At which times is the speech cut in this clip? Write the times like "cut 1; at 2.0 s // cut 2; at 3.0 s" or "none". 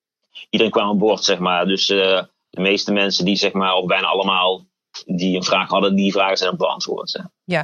none